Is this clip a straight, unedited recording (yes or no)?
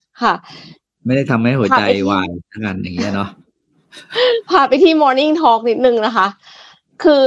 yes